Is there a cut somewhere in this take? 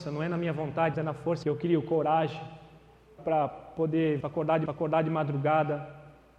yes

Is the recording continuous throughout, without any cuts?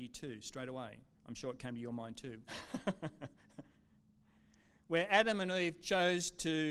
no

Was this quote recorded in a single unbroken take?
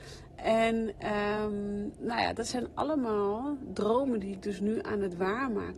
yes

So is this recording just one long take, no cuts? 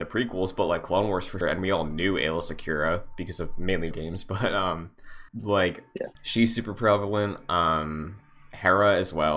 no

